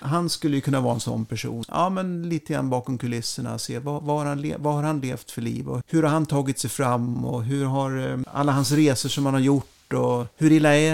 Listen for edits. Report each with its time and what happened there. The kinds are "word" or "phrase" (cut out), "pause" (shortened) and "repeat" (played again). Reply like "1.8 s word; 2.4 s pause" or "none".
5.8 s word